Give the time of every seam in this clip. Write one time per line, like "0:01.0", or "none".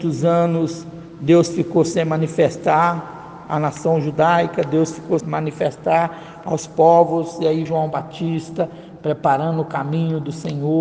0:05.2
0:07.7